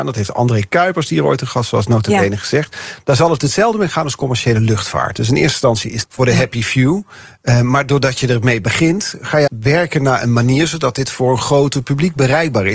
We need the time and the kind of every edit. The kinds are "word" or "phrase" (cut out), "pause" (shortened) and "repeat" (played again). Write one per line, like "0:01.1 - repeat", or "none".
0:06.0 - phrase
0:09.5 - word